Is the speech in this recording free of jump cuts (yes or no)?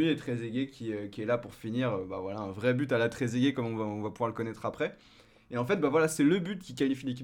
yes